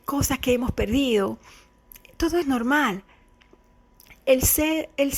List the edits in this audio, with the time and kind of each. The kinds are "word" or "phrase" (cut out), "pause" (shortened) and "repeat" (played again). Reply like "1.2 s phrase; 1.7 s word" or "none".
2.4 s word